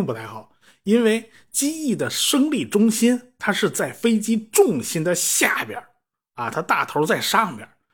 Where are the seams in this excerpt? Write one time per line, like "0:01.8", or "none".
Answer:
none